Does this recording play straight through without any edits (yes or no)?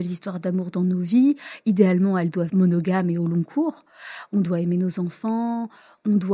no